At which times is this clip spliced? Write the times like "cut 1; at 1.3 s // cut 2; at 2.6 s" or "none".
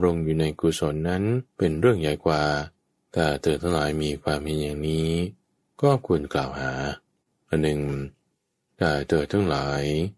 cut 1; at 1.5 s // cut 2; at 2.8 s // cut 3; at 7.2 s